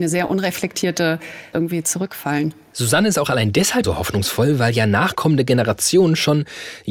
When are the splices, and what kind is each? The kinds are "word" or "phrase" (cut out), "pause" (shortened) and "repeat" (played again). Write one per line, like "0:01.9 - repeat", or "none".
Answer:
0:01.5 - word
0:03.8 - word